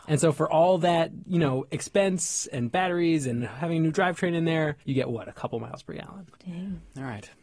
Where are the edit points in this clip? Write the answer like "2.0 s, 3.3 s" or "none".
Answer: 4.8 s, 6.3 s

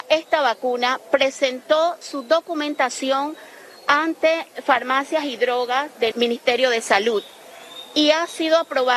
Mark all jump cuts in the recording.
2.0 s, 6.1 s

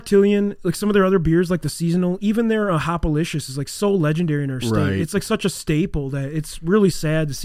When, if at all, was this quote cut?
none

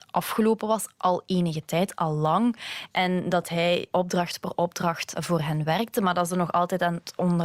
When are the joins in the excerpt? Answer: none

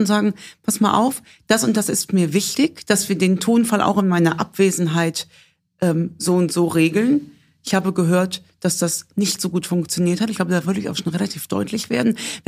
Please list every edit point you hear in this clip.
none

